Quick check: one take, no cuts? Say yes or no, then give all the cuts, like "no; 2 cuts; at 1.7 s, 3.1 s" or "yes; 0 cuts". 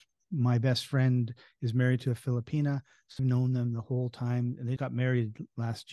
no; 2 cuts; at 3.2 s, 4.8 s